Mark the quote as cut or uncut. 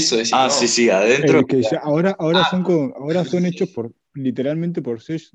uncut